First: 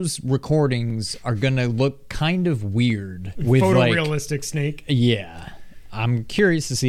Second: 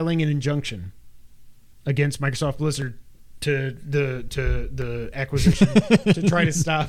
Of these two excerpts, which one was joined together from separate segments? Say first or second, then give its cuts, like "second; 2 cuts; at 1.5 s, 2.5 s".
first; 1 cut; at 3.3 s